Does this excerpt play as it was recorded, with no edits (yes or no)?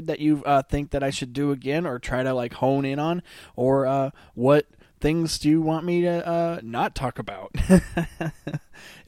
yes